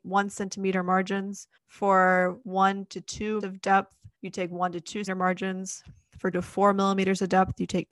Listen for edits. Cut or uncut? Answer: cut